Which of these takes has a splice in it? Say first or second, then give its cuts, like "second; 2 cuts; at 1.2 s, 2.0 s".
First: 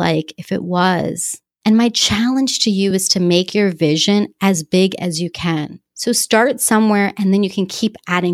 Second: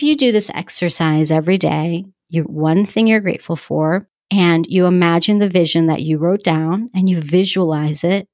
second; 1 cut; at 2.4 s